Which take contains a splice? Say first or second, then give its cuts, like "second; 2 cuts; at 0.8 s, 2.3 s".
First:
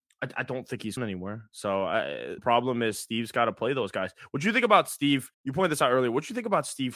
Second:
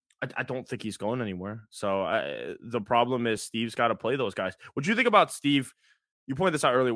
first; 3 cuts; at 1.0 s, 2.4 s, 5.3 s